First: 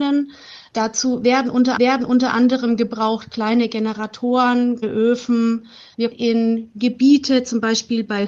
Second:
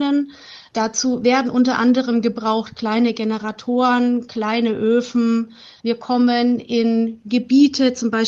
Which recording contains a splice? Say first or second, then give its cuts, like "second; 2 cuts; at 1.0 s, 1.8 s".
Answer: first; 3 cuts; at 1.8 s, 4.8 s, 6.1 s